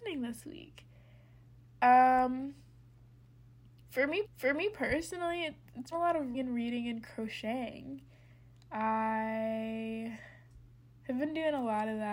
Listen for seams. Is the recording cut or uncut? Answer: cut